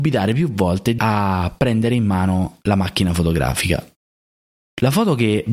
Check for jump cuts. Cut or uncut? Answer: cut